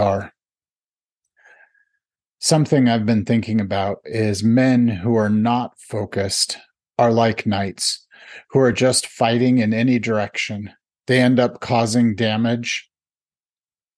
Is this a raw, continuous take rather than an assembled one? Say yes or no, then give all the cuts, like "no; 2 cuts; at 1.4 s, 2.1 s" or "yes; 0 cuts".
yes; 0 cuts